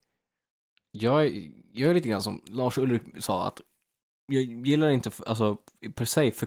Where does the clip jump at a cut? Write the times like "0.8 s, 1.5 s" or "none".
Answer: none

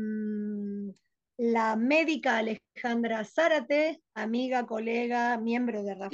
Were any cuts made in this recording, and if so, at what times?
none

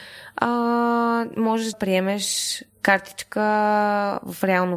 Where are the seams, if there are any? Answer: 1.7 s

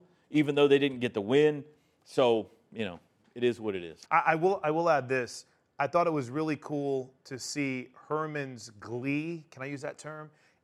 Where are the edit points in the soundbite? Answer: 4.0 s

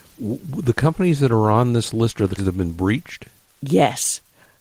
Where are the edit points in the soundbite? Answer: 2.4 s

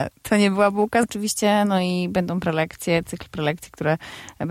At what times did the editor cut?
1.0 s

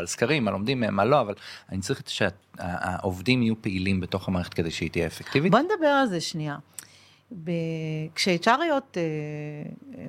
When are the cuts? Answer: none

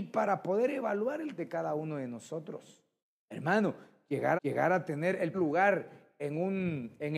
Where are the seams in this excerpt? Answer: 1.4 s, 3.0 s, 4.4 s, 5.3 s

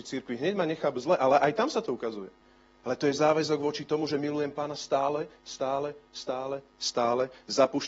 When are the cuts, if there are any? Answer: none

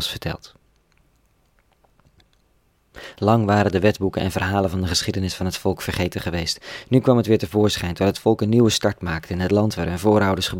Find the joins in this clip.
none

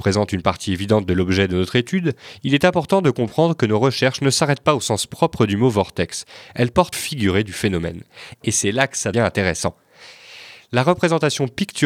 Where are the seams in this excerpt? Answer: 6.9 s, 9.1 s

